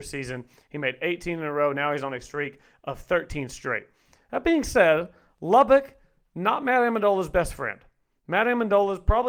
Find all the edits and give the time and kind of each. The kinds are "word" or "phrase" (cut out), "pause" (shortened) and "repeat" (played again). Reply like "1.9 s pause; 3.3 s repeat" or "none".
none